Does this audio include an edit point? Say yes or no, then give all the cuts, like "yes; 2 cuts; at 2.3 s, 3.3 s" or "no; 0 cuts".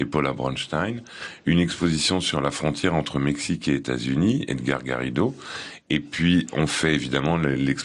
no; 0 cuts